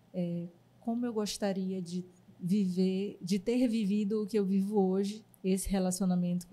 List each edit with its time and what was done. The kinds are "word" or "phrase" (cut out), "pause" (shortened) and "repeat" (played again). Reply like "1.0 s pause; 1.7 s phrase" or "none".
5.3 s pause